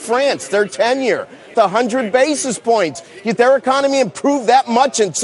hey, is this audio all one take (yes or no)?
no